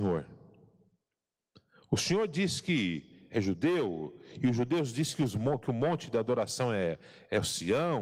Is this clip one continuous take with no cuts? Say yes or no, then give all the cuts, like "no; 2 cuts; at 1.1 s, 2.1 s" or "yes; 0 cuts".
yes; 0 cuts